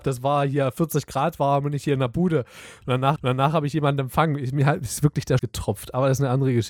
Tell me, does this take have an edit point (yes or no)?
yes